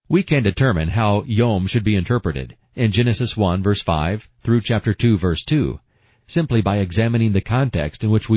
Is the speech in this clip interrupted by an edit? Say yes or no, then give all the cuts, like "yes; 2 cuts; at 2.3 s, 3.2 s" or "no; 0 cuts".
no; 0 cuts